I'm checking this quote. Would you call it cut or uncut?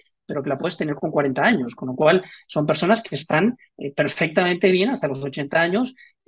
uncut